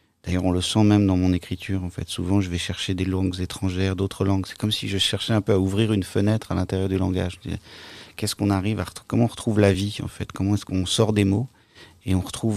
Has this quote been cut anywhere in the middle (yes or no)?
no